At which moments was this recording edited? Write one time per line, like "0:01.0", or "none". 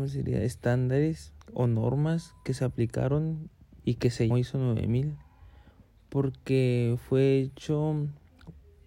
0:01.4
0:03.7
0:04.3

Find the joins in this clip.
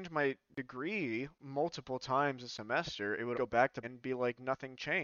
0:03.3
0:03.8

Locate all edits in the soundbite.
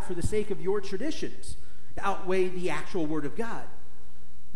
0:02.0

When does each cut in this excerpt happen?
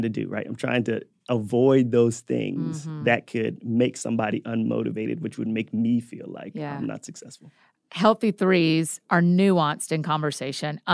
none

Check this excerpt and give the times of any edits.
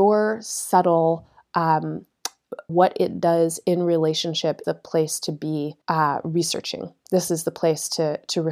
0:02.7
0:04.6
0:05.8

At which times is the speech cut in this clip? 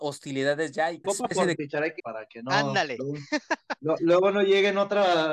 0:01.0
0:01.5
0:02.0

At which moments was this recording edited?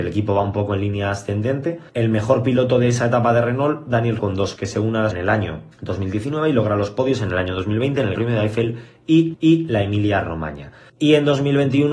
0:01.9
0:04.2
0:04.6
0:05.1
0:05.7
0:08.1
0:09.3
0:10.9

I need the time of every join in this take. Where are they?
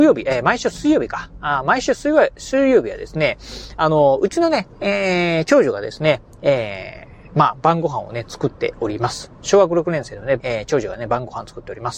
0:10.4

